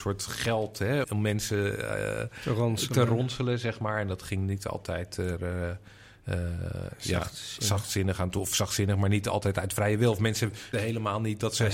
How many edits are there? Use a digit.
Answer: 2